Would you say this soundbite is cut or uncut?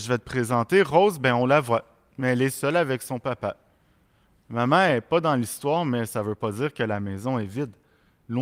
uncut